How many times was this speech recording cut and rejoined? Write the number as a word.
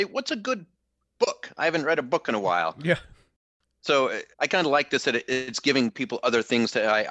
one